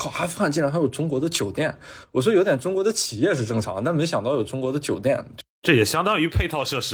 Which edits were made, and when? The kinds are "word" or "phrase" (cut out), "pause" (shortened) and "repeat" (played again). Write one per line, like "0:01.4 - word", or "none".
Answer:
0:05.5 - pause

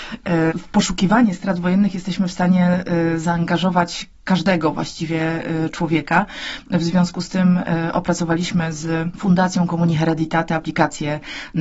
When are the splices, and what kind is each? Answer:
none

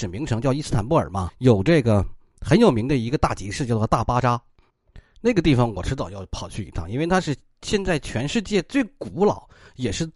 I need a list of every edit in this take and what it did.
0:01.3 - word

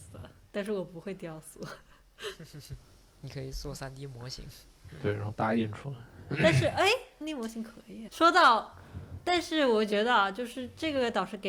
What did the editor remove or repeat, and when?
0:07.2 - word
0:08.1 - word

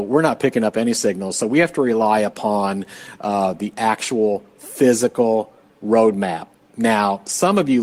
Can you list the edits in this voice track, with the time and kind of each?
none

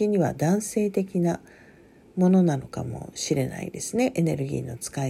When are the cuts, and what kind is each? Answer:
none

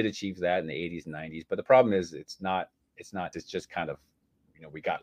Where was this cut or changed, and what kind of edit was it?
0:03.3 - word

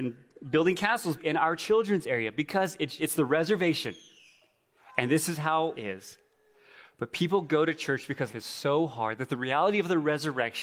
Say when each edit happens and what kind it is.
0:01.2 - word
0:03.0 - word
0:05.7 - word
0:08.3 - word

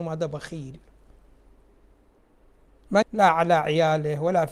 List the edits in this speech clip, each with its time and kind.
0:03.0 - word

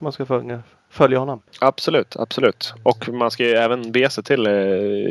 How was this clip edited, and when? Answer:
0:01.5 - pause

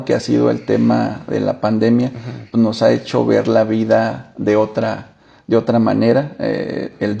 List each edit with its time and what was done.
none

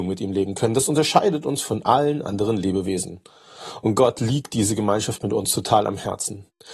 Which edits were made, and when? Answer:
none

